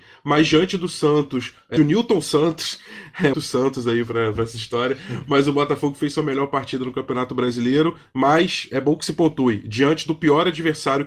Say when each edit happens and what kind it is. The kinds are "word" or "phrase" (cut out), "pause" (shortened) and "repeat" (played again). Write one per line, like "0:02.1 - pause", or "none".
0:01.8 - phrase
0:03.3 - word